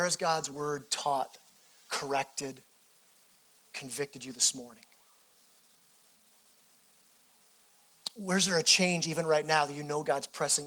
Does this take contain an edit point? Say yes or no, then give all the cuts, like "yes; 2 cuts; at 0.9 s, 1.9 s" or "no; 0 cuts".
no; 0 cuts